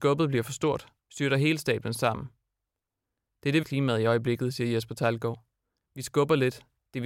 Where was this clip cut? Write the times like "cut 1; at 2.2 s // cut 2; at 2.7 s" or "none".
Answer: cut 1; at 1.0 s // cut 2; at 3.6 s

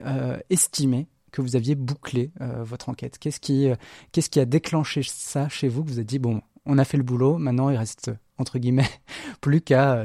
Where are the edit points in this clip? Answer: none

